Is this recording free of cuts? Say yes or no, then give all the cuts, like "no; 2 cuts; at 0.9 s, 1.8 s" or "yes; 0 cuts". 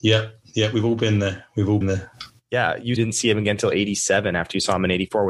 no; 2 cuts; at 1.8 s, 3.0 s